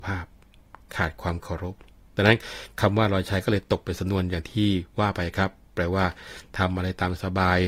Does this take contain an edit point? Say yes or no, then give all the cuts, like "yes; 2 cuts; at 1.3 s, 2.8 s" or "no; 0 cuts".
yes; 2 cuts; at 2.0 s, 4.9 s